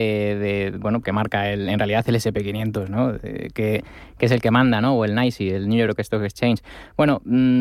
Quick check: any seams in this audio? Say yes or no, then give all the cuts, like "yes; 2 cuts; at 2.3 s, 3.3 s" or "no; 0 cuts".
yes; 2 cuts; at 1.0 s, 3.5 s